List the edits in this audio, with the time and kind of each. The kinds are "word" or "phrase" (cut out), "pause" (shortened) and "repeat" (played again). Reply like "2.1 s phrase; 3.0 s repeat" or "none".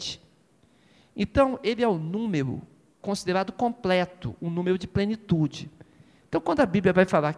none